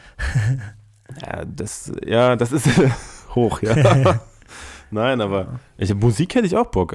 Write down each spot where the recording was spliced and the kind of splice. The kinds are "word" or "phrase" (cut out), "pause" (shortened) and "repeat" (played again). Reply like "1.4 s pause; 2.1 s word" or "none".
none

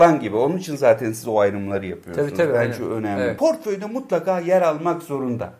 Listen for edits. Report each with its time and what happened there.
none

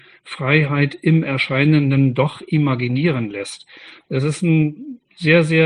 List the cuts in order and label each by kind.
none

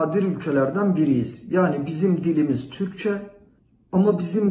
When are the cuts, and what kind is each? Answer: 3.6 s pause

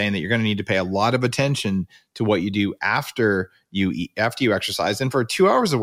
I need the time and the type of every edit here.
none

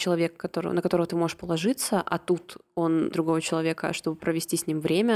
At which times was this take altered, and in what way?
3.1 s word

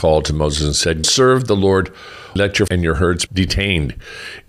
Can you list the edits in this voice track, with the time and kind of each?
1.0 s word; 2.4 s word; 2.7 s word; 3.3 s word

